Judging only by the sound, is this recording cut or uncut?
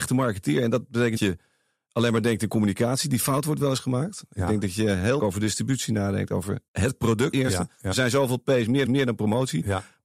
cut